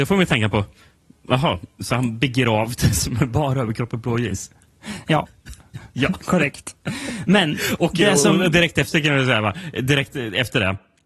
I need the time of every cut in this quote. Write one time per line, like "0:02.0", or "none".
none